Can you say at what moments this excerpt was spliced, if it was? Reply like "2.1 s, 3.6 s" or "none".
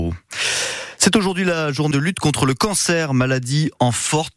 1.9 s